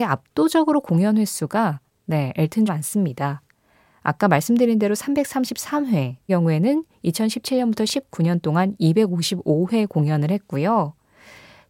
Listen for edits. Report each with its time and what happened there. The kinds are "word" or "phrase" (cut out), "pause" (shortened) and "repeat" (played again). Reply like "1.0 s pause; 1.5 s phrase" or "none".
2.7 s phrase; 6.3 s phrase